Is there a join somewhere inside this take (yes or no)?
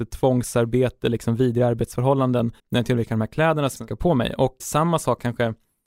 yes